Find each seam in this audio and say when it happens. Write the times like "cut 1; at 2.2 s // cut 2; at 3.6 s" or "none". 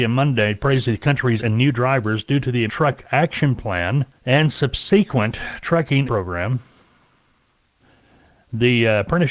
cut 1; at 1.4 s // cut 2; at 2.7 s // cut 3; at 4.2 s // cut 4; at 6.0 s